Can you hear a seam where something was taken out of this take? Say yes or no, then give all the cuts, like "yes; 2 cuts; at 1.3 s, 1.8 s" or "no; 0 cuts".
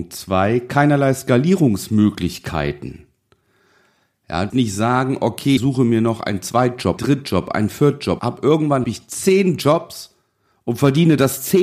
yes; 5 cuts; at 4.5 s, 5.6 s, 7.0 s, 8.2 s, 8.8 s